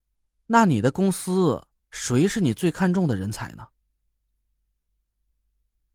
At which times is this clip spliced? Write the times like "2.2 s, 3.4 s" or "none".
1.8 s